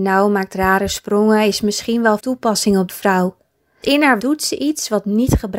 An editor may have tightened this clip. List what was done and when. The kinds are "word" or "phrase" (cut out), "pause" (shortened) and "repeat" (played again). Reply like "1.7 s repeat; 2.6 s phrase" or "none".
2.2 s word; 2.9 s word; 3.8 s word; 4.2 s word